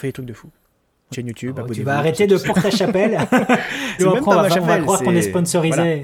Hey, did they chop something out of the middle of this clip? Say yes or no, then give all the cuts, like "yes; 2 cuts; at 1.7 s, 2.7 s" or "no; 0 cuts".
yes; 3 cuts; at 1.1 s, 2.4 s, 4.0 s